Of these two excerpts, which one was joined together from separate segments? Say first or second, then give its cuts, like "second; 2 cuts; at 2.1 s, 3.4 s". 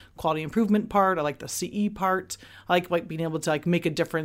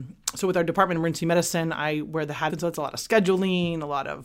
second; 1 cut; at 2.5 s